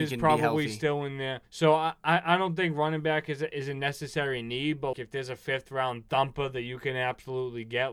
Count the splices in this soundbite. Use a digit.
2